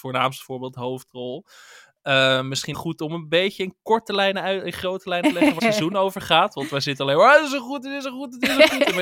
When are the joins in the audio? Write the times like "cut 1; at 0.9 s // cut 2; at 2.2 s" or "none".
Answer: cut 1; at 2.7 s // cut 2; at 5.2 s // cut 3; at 5.6 s